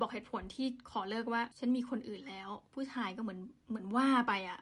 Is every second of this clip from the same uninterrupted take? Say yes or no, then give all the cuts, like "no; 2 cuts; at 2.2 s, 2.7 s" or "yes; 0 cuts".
no; 2 cuts; at 1.5 s, 3.6 s